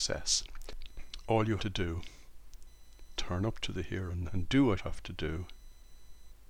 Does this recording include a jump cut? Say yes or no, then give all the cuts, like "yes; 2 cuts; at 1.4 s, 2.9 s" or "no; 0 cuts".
yes; 4 cuts; at 1.6 s, 3.2 s, 4.3 s, 4.8 s